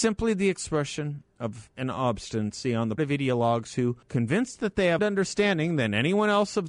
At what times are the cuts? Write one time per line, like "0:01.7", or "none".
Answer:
0:01.7
0:03.0
0:04.0
0:05.0